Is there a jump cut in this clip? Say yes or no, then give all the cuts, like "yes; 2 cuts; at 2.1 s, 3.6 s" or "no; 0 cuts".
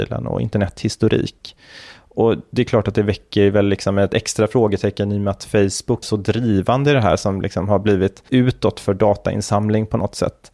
yes; 2 cuts; at 6.0 s, 8.3 s